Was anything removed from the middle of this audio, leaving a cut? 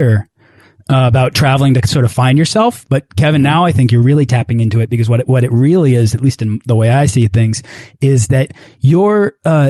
no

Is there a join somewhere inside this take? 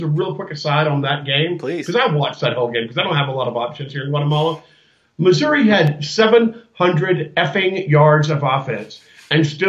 no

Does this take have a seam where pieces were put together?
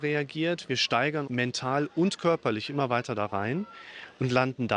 yes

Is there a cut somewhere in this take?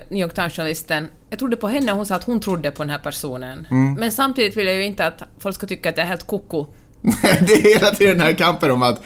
no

